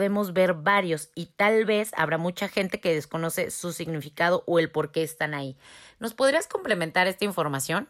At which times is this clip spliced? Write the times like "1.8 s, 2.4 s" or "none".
none

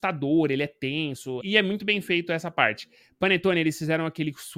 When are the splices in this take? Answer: 1.4 s, 3.0 s

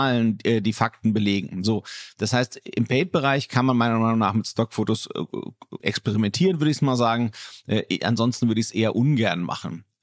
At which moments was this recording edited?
5.8 s

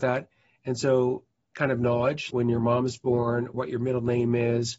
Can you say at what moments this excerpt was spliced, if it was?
1.5 s, 2.3 s, 3.5 s

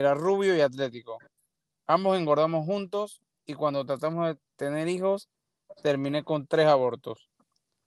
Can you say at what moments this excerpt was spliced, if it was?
none

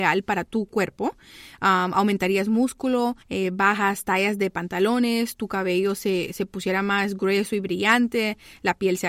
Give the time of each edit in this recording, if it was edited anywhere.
3.2 s

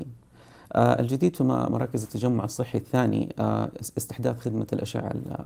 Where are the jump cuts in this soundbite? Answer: none

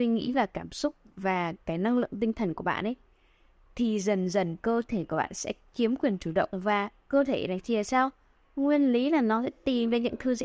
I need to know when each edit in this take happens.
none

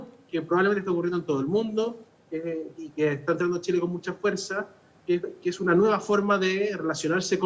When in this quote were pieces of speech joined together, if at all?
none

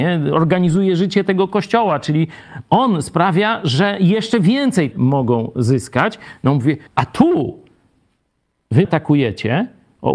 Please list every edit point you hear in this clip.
4.9 s, 6.9 s, 8.8 s

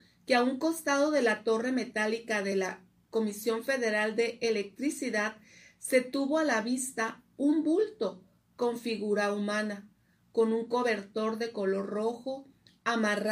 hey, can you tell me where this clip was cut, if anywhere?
none

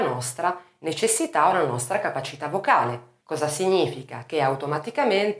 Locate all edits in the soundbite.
3.2 s

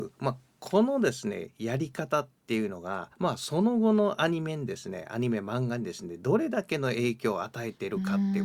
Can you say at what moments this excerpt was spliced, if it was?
3.1 s

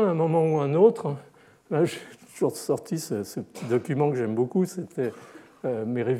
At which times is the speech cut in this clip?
none

